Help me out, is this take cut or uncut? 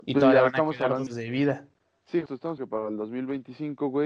cut